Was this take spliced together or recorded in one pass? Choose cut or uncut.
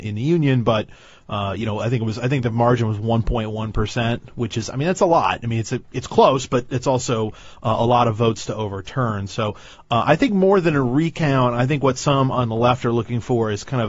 uncut